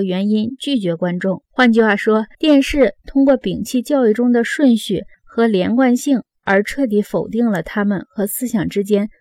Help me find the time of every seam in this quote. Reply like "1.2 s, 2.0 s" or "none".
1.4 s, 2.3 s